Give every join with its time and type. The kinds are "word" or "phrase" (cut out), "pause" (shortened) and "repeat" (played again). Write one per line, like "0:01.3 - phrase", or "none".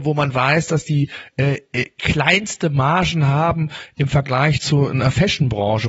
none